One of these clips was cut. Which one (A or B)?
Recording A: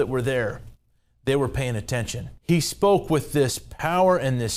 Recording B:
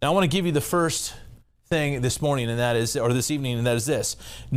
A